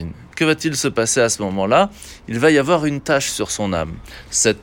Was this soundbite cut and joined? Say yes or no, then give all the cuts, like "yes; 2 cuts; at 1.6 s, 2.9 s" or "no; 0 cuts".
no; 0 cuts